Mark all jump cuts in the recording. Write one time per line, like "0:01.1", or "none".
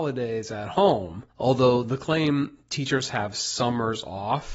0:01.3

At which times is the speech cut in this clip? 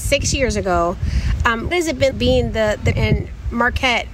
0:01.7
0:02.1
0:02.9

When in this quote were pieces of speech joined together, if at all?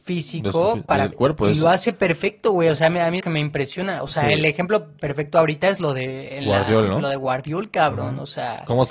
0:01.1
0:03.2
0:05.0

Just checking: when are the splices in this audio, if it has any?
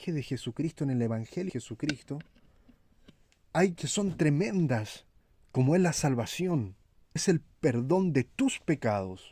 0:01.5
0:03.8
0:05.2
0:07.2

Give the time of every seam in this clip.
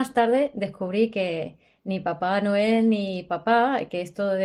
none

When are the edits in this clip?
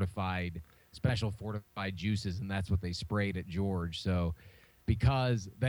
none

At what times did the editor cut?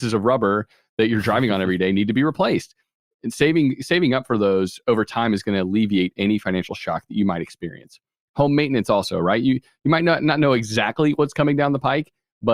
none

